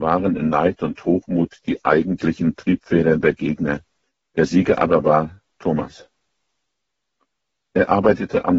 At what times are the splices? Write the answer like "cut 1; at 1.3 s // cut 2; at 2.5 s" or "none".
cut 1; at 4.0 s // cut 2; at 5.5 s